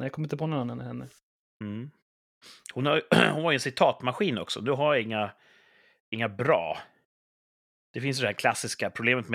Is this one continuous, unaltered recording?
yes; 0 cuts

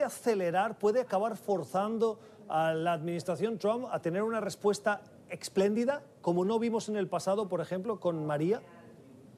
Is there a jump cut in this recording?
no; 0 cuts

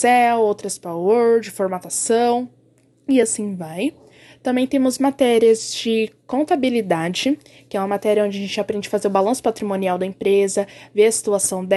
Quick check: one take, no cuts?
yes; 0 cuts

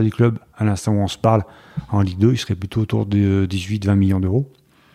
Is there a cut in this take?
no; 0 cuts

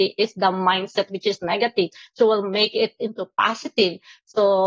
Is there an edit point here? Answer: no; 0 cuts

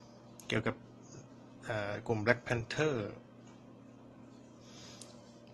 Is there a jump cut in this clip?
no; 0 cuts

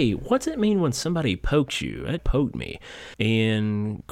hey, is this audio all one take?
no; 2 cuts; at 2.2 s, 3.1 s

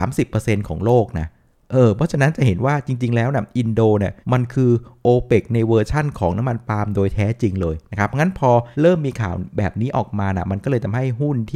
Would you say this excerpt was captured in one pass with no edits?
no; 2 cuts; at 4.2 s, 8.7 s

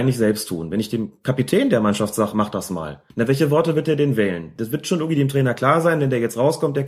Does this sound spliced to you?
yes; 1 cut; at 3.1 s

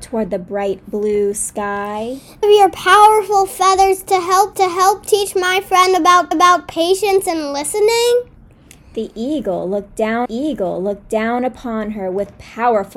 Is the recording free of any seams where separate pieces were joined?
no; 4 cuts; at 2.4 s, 4.5 s, 6.3 s, 10.3 s

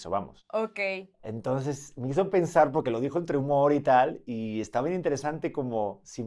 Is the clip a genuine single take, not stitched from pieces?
yes; 0 cuts

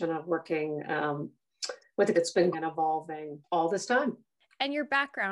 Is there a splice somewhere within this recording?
yes; 3 cuts; at 2.1 s, 2.5 s, 3.4 s

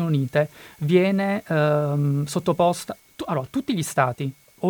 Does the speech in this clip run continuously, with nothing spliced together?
yes; 0 cuts

